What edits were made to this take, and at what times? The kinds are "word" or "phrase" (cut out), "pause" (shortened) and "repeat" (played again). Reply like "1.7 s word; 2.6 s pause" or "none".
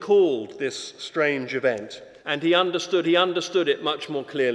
2.2 s pause; 3.0 s repeat